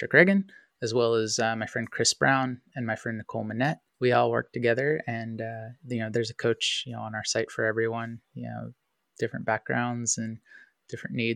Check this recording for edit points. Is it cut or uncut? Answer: cut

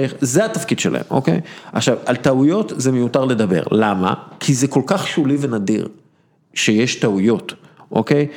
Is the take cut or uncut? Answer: uncut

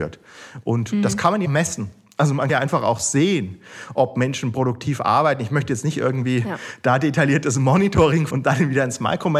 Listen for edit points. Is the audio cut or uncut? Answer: cut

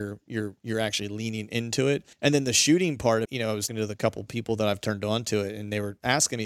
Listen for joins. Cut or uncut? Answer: cut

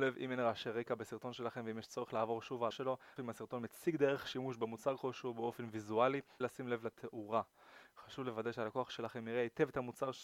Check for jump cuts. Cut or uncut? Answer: cut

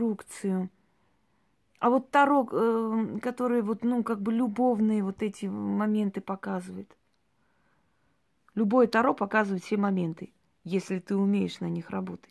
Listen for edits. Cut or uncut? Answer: uncut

